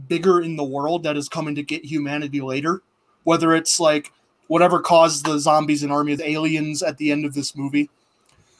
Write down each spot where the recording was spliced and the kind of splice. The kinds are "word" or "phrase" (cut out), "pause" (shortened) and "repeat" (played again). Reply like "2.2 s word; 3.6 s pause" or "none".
6.2 s phrase